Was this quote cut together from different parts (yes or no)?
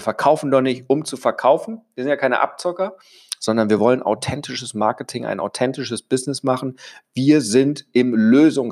no